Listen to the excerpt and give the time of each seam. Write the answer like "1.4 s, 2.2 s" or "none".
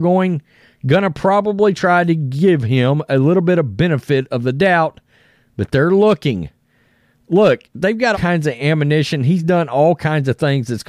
8.1 s